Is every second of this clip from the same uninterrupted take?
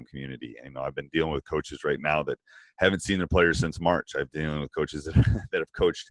yes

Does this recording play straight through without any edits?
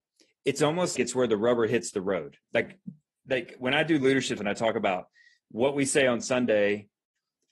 no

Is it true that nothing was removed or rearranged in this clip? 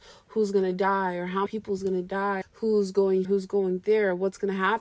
no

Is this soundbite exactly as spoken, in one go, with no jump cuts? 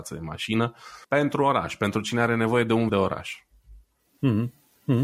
no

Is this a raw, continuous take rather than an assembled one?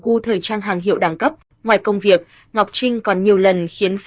yes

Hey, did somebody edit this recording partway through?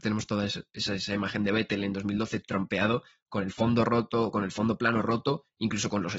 no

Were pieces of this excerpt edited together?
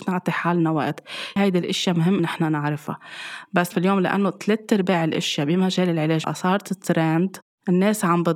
yes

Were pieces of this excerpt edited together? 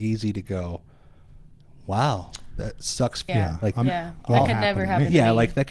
yes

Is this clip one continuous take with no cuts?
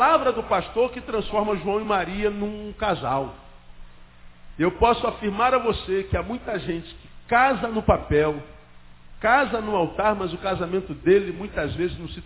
yes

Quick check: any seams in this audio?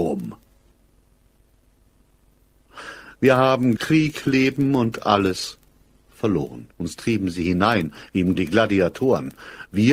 yes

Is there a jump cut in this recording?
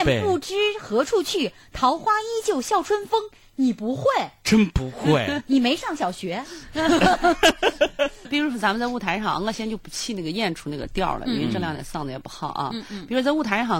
yes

